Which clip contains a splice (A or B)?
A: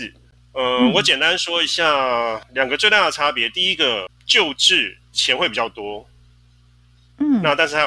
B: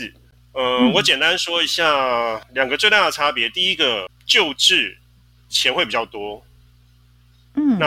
A